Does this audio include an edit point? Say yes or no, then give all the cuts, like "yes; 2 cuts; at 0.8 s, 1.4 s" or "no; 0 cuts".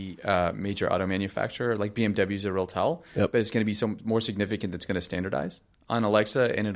no; 0 cuts